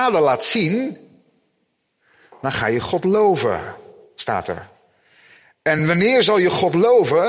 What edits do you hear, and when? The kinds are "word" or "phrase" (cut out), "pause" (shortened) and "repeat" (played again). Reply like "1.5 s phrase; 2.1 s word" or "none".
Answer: none